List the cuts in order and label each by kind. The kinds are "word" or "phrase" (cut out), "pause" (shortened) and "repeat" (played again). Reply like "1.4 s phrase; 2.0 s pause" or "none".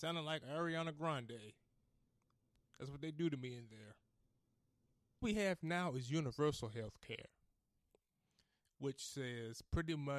none